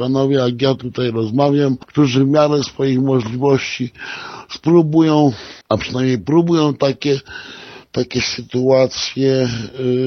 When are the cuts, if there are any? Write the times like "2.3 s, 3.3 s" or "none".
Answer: 5.6 s